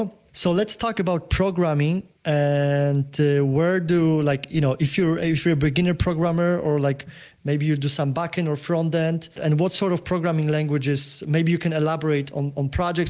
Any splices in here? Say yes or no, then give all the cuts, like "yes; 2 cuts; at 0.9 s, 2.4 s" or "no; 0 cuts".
yes; 2 cuts; at 2.2 s, 9.4 s